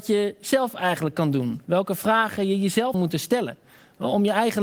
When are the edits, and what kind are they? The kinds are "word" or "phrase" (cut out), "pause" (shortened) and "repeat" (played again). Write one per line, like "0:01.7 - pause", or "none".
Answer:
0:02.9 - word